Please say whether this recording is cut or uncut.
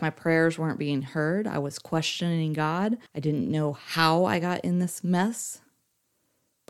cut